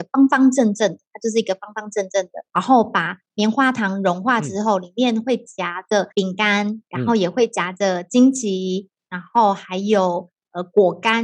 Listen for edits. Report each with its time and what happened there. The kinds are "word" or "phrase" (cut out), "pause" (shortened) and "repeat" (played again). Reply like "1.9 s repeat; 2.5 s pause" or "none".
2.5 s pause; 6.1 s pause; 6.9 s pause